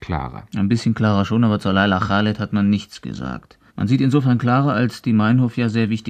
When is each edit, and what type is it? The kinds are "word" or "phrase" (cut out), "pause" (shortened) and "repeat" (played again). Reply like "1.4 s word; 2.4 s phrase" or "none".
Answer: 3.7 s pause